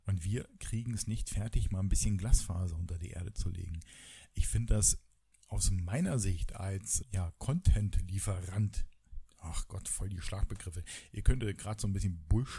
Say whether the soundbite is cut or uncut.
cut